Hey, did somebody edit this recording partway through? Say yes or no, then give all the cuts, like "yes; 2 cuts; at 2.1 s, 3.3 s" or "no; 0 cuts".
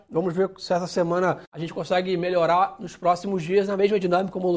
yes; 1 cut; at 1.4 s